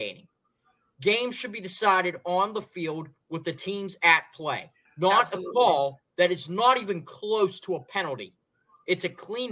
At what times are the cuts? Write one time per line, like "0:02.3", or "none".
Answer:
0:04.9